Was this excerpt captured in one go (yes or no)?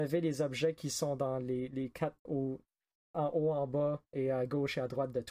yes